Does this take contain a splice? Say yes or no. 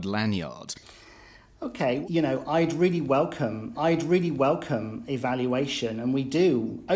yes